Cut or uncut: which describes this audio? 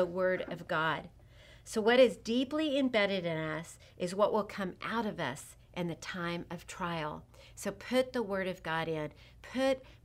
uncut